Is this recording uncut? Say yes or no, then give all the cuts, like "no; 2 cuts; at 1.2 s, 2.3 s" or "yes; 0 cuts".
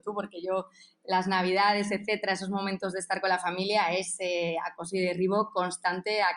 yes; 0 cuts